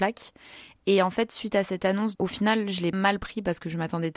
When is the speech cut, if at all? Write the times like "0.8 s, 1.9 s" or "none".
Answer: 2.1 s, 2.9 s